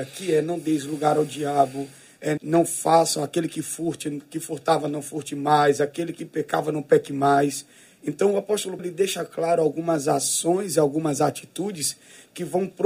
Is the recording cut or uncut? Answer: cut